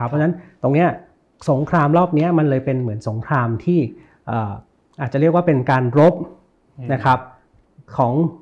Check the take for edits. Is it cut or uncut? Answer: uncut